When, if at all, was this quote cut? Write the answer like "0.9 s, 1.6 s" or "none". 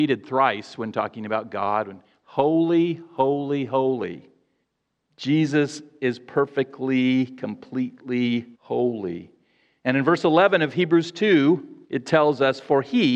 4.6 s, 8.5 s, 11.8 s